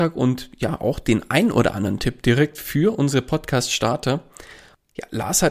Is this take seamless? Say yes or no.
yes